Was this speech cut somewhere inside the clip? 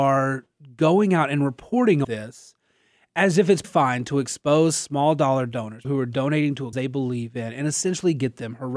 yes; 4 cuts; at 2.0 s, 3.6 s, 5.8 s, 6.7 s

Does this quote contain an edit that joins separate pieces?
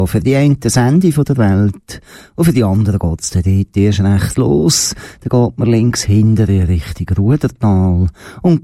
no; 0 cuts

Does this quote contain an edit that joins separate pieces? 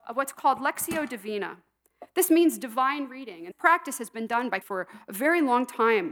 yes; 2 cuts; at 3.5 s, 4.6 s

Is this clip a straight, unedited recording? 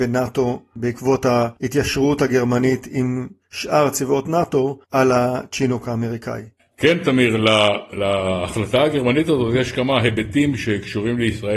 no; 2 cuts; at 4.8 s, 6.6 s

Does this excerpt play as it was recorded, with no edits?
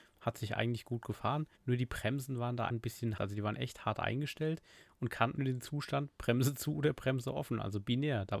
no; 3 cuts; at 1.5 s, 2.7 s, 5.3 s

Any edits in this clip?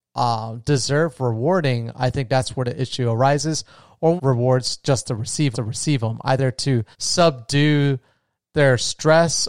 yes; 3 cuts; at 4.2 s, 5.5 s, 6.9 s

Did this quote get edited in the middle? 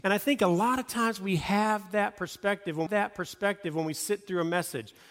yes; 1 cut; at 2.9 s

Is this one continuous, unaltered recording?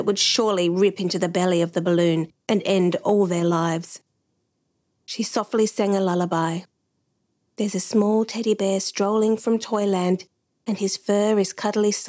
yes; 0 cuts

